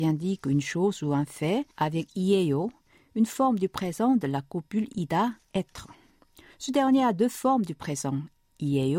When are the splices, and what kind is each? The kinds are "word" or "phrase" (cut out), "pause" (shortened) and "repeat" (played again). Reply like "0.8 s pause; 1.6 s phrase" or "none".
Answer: 1.7 s pause